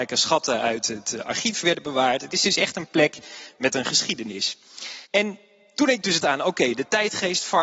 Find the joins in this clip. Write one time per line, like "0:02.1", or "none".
0:05.1
0:06.2